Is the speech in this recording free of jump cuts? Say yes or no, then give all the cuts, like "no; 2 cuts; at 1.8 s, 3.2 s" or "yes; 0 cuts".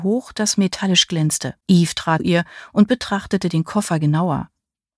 no; 2 cuts; at 1.6 s, 2.2 s